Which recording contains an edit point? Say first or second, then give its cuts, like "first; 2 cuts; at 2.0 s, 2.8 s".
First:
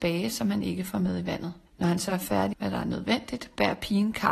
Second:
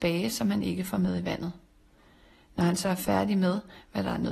first; 2 cuts; at 1.7 s, 2.5 s